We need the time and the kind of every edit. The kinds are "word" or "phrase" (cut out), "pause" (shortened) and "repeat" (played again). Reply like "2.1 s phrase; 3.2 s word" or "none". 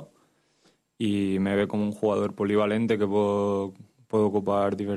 none